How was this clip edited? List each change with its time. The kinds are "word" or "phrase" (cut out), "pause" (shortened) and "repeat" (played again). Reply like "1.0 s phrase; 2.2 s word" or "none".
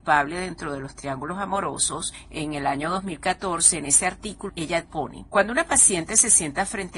4.5 s word; 5.3 s pause